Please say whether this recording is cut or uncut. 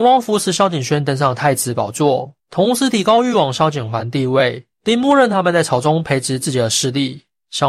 cut